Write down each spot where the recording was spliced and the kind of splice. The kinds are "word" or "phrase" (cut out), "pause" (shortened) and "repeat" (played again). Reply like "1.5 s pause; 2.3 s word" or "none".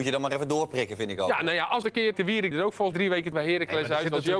1.8 s word; 2.1 s word; 2.5 s word; 2.9 s word; 3.3 s word

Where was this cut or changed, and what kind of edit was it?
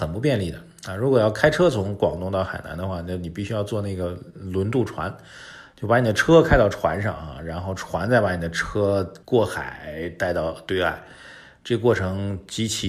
9.2 s pause

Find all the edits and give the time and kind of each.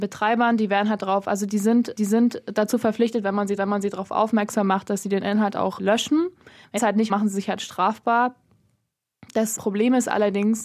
2.0 s repeat; 3.6 s repeat; 5.8 s word; 6.8 s word; 7.1 s word; 9.6 s word

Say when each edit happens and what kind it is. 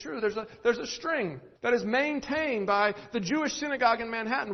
1.6 s pause

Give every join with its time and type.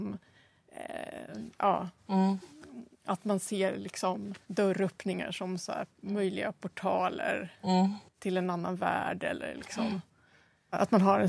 2.9 s pause; 4.4 s pause; 8.1 s pause

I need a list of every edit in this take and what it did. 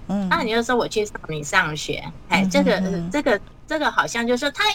none

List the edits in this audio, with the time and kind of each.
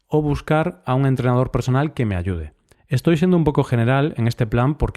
2.7 s pause

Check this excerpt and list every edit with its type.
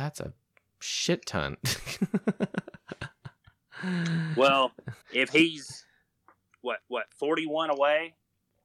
5.0 s pause; 6.8 s repeat

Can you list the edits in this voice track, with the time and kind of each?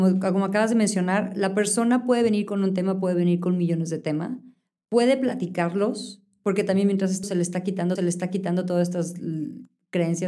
7.2 s word; 8.0 s repeat

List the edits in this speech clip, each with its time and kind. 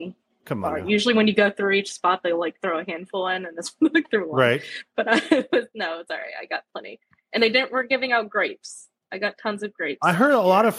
none

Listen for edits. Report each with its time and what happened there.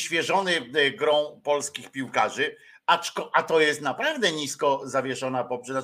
none

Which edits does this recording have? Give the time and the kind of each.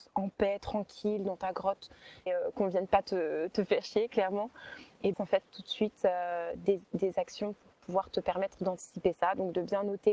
2.3 s word; 5.1 s phrase

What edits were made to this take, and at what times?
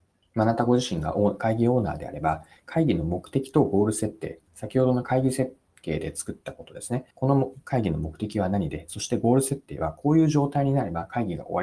7.1 s pause

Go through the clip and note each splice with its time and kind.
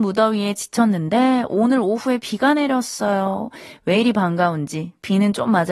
none

